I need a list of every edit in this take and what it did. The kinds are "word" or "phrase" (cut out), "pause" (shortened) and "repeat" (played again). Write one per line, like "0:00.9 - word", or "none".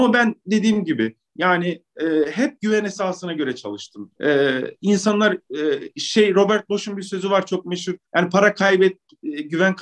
0:04.2 - pause
0:08.0 - pause